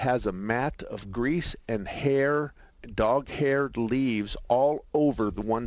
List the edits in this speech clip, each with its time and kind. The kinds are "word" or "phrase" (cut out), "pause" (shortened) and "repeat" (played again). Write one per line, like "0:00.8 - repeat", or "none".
none